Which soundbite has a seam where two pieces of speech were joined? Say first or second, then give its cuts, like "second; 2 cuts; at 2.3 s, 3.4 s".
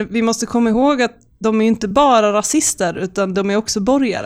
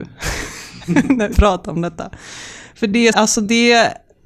second; 2 cuts; at 1.3 s, 3.1 s